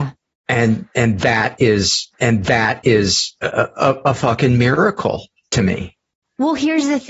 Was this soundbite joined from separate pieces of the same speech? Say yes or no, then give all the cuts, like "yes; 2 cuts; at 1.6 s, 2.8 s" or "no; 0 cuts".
yes; 1 cut; at 2.1 s